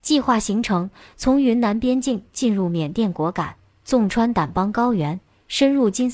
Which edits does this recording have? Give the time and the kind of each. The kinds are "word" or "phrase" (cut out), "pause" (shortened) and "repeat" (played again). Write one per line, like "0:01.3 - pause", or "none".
none